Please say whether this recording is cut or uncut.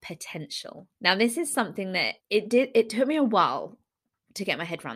cut